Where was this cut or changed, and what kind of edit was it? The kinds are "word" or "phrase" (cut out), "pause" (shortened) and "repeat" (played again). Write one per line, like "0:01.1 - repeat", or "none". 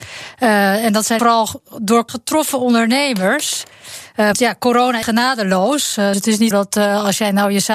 0:01.2 - word
0:02.1 - word
0:04.3 - word
0:05.0 - word
0:06.1 - word
0:06.5 - word